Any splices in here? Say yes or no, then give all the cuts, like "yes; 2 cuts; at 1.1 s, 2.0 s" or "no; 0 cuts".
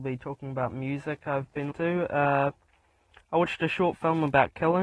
yes; 1 cut; at 1.7 s